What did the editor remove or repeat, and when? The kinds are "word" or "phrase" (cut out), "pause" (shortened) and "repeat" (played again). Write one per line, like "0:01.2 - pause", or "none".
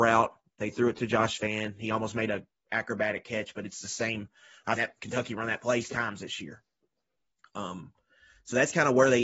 0:04.8 - word
0:05.8 - word